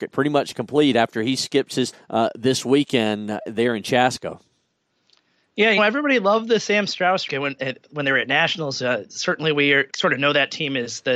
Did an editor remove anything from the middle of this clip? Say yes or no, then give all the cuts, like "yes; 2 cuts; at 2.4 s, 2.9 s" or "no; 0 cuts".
yes; 4 cuts; at 1.9 s, 5.8 s, 7.3 s, 9.9 s